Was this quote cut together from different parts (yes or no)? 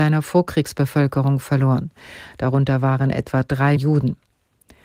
yes